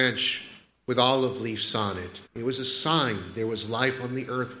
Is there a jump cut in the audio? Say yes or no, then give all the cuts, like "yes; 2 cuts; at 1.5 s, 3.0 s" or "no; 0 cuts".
yes; 1 cut; at 2.3 s